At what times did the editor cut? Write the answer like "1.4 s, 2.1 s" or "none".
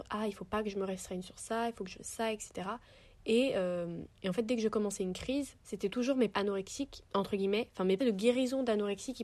1.9 s, 4.1 s, 5.6 s, 6.3 s, 7.1 s, 8.0 s